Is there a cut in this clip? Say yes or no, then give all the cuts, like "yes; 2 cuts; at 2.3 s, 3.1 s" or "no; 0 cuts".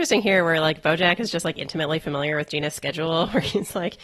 no; 0 cuts